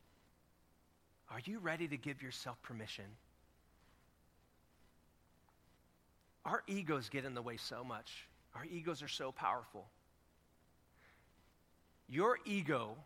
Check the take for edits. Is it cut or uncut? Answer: uncut